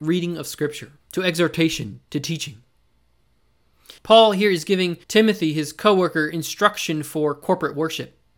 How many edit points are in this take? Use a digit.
4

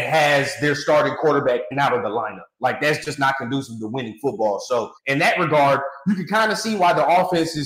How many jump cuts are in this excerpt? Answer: 2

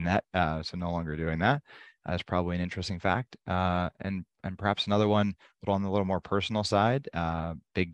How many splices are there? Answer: 0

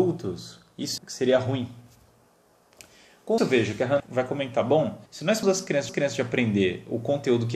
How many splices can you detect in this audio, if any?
6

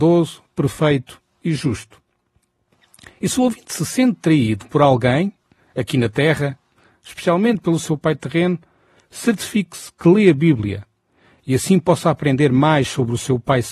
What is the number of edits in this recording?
0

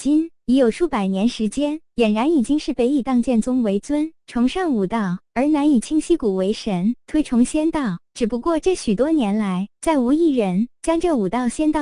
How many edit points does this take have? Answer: 0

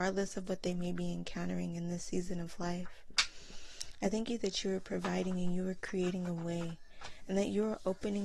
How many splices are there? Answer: 0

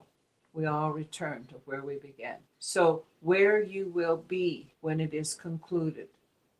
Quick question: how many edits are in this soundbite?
2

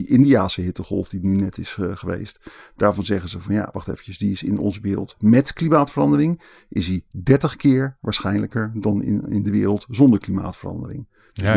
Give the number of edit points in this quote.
0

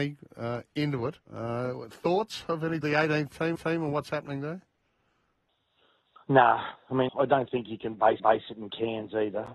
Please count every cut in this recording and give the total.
6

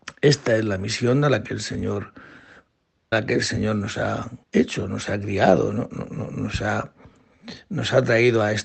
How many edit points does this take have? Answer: 2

